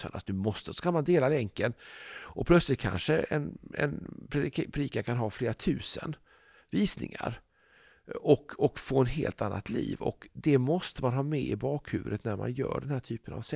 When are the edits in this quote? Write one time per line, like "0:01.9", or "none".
none